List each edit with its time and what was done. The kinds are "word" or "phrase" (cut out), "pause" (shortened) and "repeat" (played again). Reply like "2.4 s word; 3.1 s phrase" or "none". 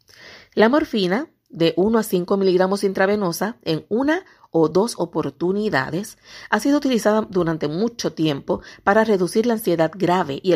none